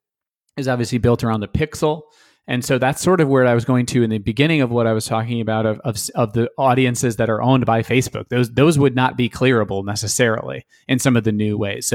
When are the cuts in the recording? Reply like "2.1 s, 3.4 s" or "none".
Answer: none